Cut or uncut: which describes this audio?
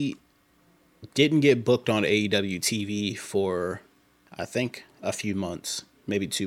uncut